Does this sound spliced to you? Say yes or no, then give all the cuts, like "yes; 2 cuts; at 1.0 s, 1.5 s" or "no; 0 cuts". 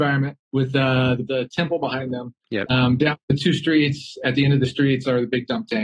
yes; 2 cuts; at 1.3 s, 2.4 s